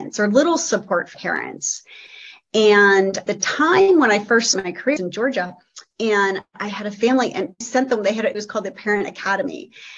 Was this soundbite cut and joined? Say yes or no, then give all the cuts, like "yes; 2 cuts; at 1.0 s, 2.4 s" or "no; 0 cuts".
yes; 6 cuts; at 1.1 s, 3.3 s, 4.5 s, 5.0 s, 7.6 s, 8.3 s